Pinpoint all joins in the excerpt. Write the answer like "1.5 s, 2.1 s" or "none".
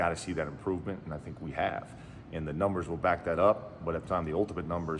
4.0 s